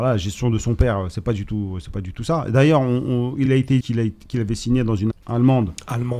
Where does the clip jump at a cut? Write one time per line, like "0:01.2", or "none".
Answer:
0:03.5
0:03.8
0:05.1